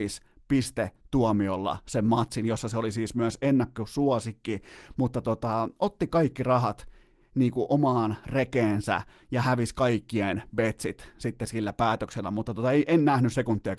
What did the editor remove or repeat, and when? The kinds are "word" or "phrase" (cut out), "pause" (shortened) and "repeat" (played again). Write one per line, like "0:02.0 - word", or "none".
none